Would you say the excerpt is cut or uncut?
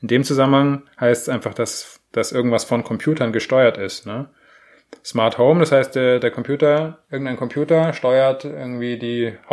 uncut